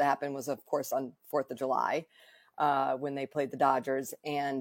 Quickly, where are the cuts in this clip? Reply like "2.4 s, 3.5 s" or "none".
none